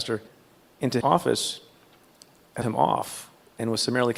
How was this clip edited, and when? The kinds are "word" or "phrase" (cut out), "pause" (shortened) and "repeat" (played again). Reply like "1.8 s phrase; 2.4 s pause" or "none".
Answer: 1.0 s word; 2.6 s phrase